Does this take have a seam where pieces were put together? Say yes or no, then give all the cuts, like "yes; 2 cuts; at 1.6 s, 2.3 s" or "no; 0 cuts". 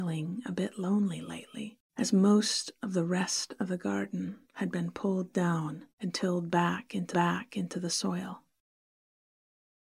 yes; 4 cuts; at 1.9 s, 4.4 s, 5.9 s, 7.1 s